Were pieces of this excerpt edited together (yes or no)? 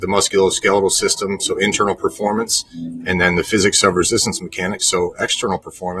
no